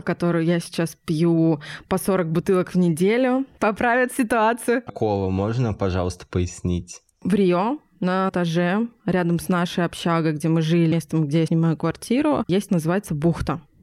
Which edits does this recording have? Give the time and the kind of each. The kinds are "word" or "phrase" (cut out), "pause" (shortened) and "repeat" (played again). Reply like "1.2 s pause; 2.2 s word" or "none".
4.9 s phrase; 8.3 s word; 10.9 s phrase; 11.5 s word; 12.7 s word